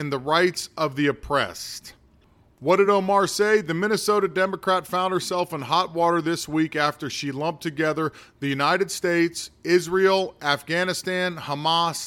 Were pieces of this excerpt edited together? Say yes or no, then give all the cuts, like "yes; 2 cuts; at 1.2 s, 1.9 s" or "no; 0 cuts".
no; 0 cuts